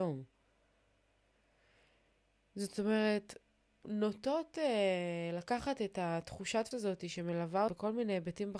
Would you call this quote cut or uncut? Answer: cut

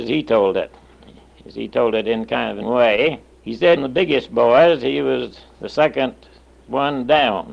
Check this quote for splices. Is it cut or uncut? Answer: cut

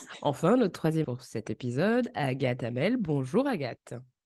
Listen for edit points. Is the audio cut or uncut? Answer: cut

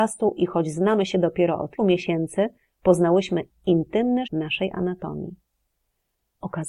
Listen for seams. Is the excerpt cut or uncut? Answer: cut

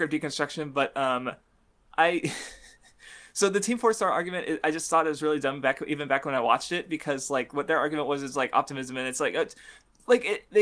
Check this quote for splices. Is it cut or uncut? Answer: uncut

